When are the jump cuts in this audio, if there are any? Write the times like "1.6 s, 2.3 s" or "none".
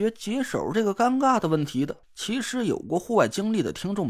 2.0 s